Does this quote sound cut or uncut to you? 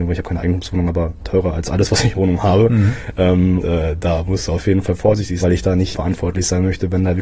cut